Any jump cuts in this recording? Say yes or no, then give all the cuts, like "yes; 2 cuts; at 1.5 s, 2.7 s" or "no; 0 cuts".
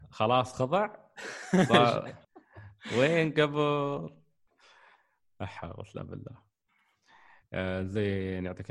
yes; 1 cut; at 2.2 s